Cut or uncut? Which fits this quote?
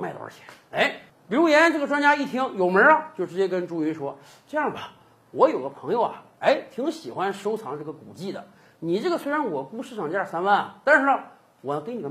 uncut